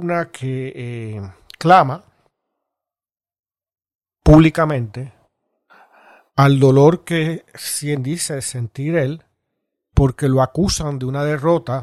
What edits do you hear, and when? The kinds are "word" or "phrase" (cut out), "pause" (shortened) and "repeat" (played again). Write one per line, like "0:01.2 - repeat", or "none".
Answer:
none